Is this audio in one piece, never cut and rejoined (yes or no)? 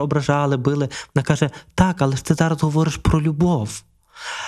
yes